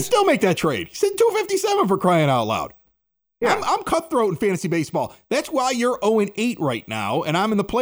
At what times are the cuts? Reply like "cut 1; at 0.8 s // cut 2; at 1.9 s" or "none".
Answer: none